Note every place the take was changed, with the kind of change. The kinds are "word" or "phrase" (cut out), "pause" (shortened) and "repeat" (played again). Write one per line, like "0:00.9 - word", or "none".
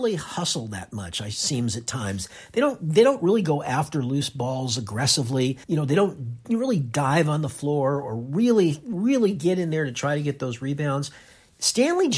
0:05.6 - pause